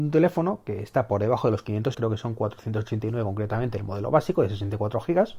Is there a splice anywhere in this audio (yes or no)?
yes